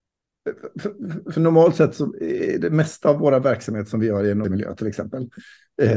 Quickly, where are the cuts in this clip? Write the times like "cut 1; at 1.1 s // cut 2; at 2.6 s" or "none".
cut 1; at 4.4 s